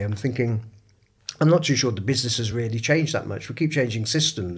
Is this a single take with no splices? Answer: yes; 0 cuts

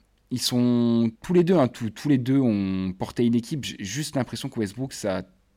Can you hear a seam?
yes; 1 cut; at 1.1 s

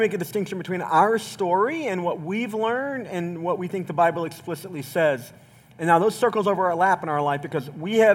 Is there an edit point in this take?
no; 0 cuts

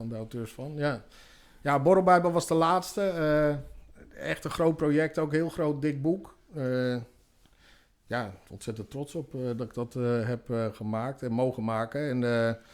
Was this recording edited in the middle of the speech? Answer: no; 0 cuts

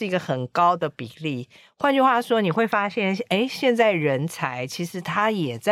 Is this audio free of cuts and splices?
yes; 0 cuts

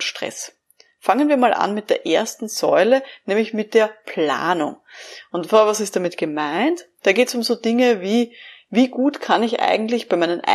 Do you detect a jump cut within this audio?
no; 0 cuts

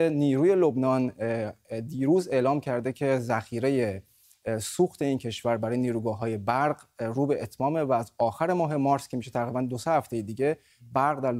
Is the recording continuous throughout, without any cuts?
yes; 0 cuts

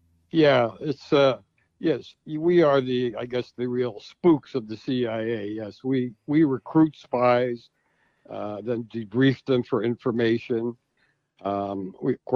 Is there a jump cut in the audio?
no; 0 cuts

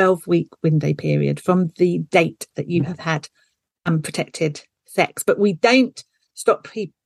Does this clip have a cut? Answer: no; 0 cuts

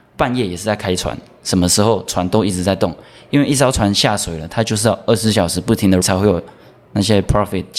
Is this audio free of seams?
no; 1 cut; at 6.0 s

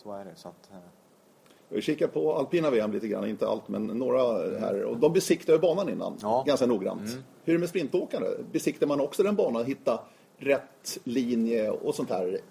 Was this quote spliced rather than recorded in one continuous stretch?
no; 0 cuts

